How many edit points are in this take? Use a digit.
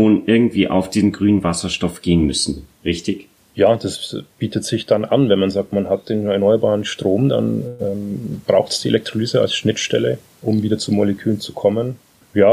0